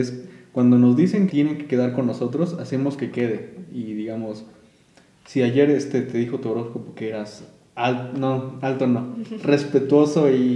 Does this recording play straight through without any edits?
no; 1 cut; at 1.3 s

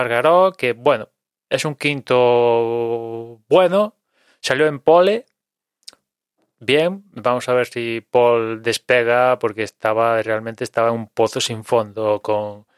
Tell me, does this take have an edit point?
no; 0 cuts

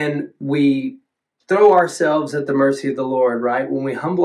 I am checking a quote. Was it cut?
no; 0 cuts

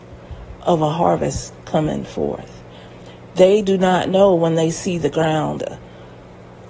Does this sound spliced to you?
no; 0 cuts

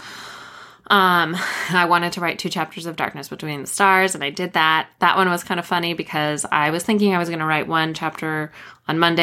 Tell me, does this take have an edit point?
no; 0 cuts

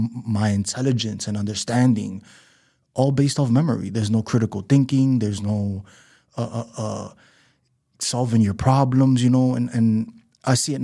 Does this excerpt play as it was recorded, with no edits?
yes; 0 cuts

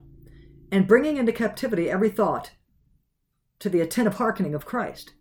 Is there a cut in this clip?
no; 0 cuts

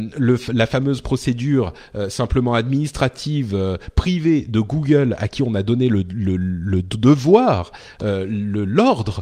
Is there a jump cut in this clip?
no; 0 cuts

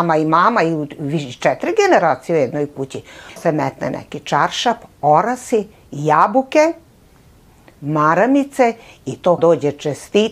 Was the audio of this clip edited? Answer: yes; 2 cuts; at 3.4 s, 9.4 s

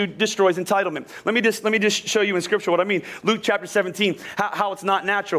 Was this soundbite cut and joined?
no; 0 cuts

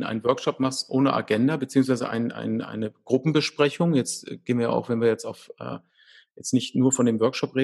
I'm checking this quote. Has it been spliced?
no; 0 cuts

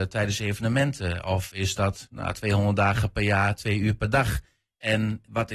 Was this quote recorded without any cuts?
yes; 0 cuts

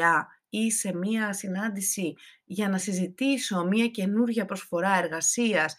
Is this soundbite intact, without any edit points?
yes; 0 cuts

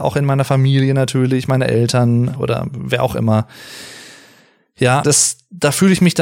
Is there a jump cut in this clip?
yes; 2 cuts; at 2.3 s, 5.0 s

